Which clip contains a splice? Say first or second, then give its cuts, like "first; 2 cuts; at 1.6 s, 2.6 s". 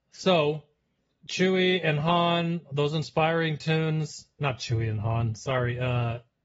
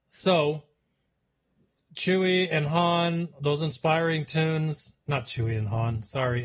first; 1 cut; at 1.0 s